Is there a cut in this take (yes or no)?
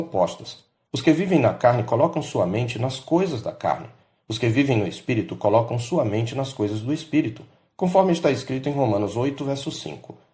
no